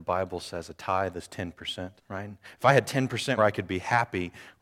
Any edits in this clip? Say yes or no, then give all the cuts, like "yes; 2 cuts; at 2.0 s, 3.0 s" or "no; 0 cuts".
yes; 2 cuts; at 2.0 s, 3.4 s